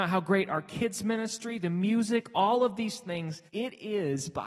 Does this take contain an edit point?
yes; 1 cut; at 3.5 s

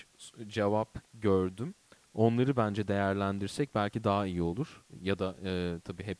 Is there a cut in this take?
no; 0 cuts

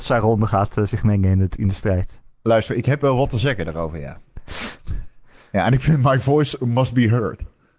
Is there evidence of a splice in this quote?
no; 0 cuts

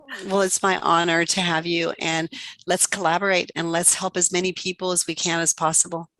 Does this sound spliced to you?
no; 0 cuts

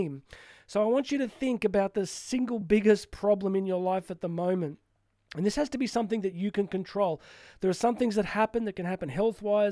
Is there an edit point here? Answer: no; 0 cuts

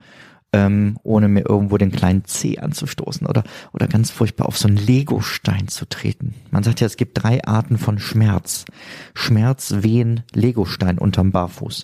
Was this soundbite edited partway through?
no; 0 cuts

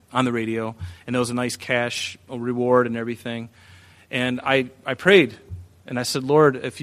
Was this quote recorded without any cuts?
yes; 0 cuts

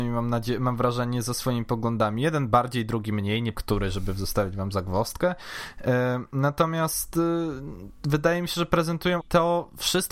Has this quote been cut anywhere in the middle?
yes; 2 cuts; at 3.5 s, 9.2 s

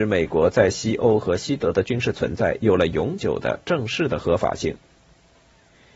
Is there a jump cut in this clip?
no; 0 cuts

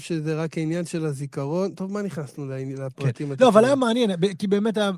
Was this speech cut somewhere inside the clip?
no; 0 cuts

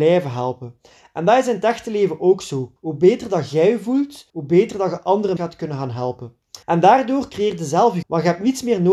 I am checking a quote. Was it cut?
yes; 5 cuts; at 2.8 s, 4.3 s, 5.4 s, 6.6 s, 8.0 s

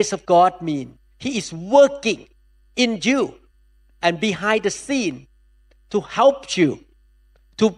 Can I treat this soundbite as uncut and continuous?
yes; 0 cuts

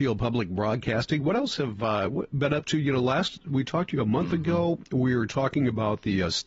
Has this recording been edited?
no; 0 cuts

